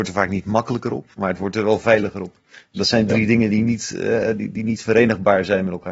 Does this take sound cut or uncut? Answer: uncut